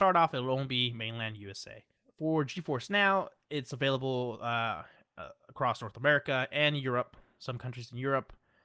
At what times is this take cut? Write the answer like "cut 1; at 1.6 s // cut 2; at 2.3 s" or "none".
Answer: none